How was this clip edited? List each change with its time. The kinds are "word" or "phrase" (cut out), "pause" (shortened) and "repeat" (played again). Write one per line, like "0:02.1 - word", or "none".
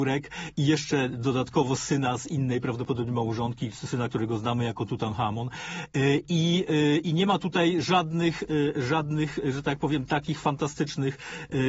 none